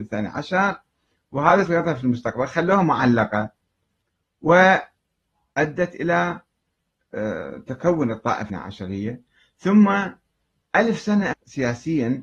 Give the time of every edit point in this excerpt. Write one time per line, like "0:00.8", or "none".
0:01.7
0:08.5
0:11.3

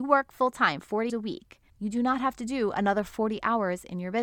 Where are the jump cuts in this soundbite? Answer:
0:01.1
0:01.7

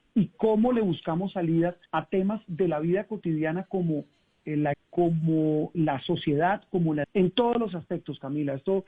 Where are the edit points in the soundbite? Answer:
0:01.9
0:04.7
0:05.7
0:07.0

